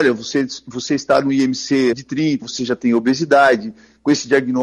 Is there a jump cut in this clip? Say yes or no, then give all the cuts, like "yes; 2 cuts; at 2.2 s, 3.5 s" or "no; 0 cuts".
yes; 2 cuts; at 1.9 s, 2.4 s